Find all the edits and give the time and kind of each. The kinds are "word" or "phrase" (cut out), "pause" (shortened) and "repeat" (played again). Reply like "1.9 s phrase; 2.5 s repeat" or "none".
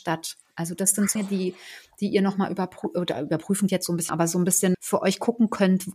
1.2 s word; 3.7 s word; 4.1 s word; 4.7 s word